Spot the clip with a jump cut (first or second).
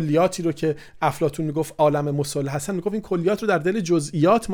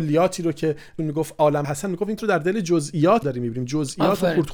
second